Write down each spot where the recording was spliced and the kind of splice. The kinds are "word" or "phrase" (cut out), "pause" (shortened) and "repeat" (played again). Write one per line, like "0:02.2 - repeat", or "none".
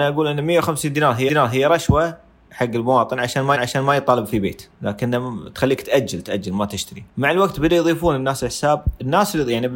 0:01.3 - repeat
0:03.5 - repeat
0:04.7 - pause
0:06.2 - word
0:07.1 - pause